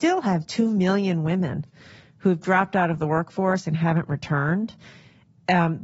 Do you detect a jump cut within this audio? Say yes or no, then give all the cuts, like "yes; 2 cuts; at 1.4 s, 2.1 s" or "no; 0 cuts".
no; 0 cuts